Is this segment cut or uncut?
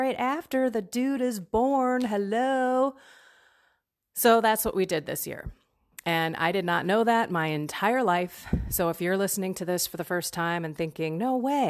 uncut